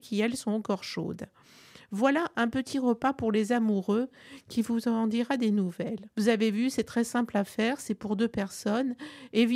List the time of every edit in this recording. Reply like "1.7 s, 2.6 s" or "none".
6.1 s